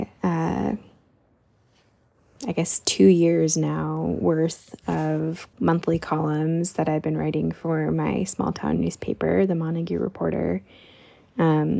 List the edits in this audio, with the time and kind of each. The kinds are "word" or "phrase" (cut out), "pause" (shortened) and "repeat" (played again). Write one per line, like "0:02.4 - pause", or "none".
0:05.5 - pause